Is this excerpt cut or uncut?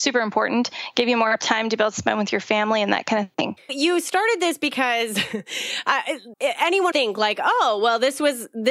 cut